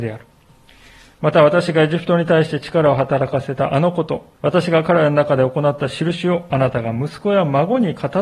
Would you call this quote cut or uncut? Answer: cut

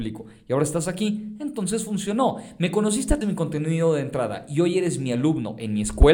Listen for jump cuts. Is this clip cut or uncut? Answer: cut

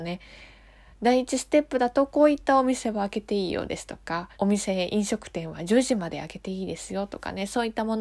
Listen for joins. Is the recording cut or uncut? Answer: cut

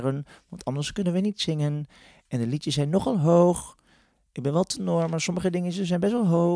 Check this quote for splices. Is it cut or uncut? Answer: uncut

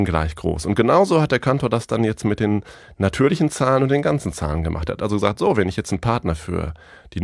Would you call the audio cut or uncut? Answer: uncut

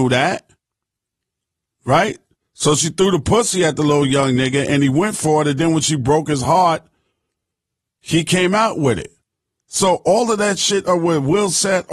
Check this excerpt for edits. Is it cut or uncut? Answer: uncut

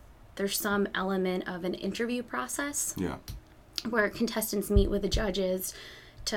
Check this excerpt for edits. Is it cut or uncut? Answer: uncut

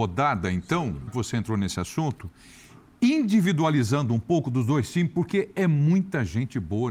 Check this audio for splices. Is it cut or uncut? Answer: cut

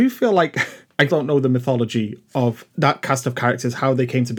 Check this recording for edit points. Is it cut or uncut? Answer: cut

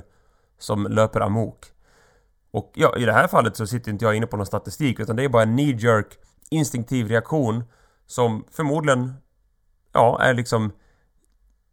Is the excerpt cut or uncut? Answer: uncut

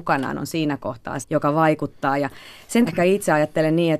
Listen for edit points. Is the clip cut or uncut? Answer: cut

